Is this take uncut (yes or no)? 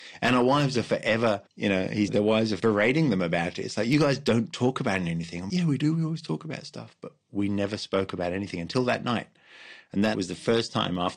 no